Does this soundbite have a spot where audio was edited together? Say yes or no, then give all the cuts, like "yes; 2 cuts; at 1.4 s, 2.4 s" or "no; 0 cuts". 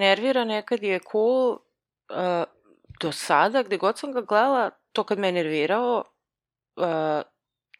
no; 0 cuts